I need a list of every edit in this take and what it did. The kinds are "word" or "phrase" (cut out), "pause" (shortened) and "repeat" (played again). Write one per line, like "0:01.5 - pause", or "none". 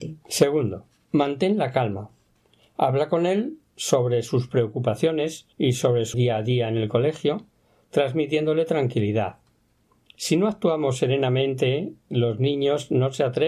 0:05.5 - pause
0:06.1 - phrase